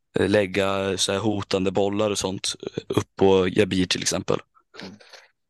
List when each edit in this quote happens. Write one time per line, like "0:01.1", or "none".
0:03.1

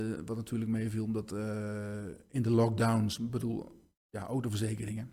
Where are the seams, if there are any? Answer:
none

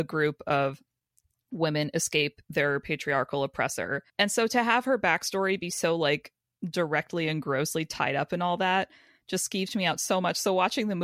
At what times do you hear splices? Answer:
0:04.1

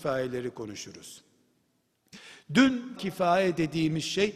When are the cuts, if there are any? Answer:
0:03.0

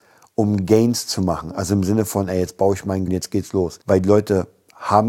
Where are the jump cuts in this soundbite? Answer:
0:03.1
0:03.8

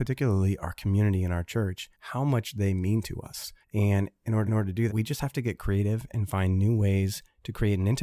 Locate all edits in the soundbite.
0:01.9
0:03.6
0:04.5
0:04.9

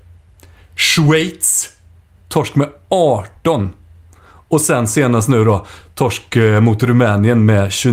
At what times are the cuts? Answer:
none

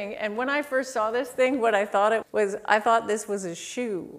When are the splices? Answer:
0:02.2

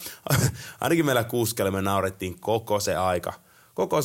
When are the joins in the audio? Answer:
none

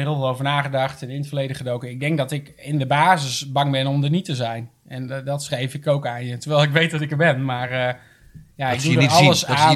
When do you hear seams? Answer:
none

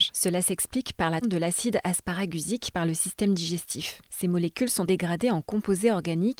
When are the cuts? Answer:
0:01.2
0:04.9

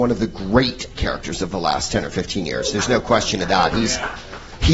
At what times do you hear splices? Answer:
0:00.9

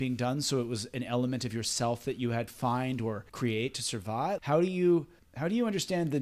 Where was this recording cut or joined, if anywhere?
0:02.5
0:03.3
0:04.4
0:05.2

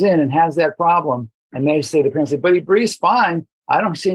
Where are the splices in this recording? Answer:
none

